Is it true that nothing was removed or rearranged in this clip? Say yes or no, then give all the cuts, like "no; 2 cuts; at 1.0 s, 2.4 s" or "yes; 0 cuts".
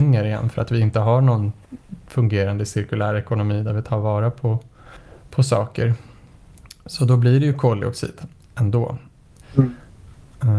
yes; 0 cuts